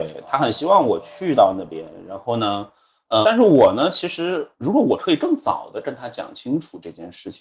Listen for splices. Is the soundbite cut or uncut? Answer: cut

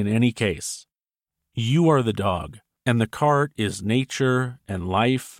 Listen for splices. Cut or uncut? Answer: uncut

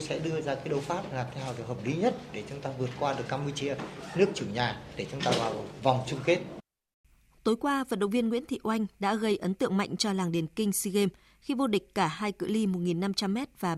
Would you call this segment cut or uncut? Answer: uncut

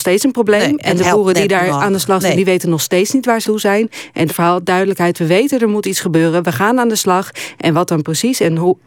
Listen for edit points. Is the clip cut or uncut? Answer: cut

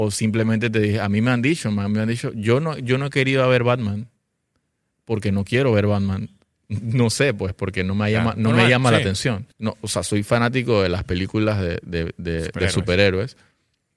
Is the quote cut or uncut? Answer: cut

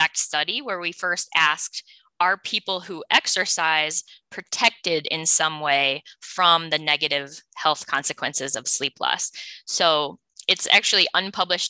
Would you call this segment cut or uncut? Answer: uncut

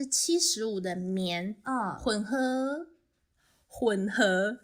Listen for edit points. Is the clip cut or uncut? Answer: uncut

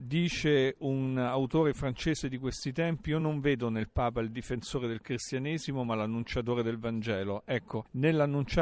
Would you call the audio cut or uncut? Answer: uncut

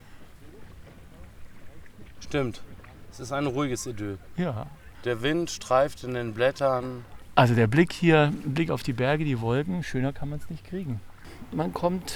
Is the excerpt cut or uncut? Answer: uncut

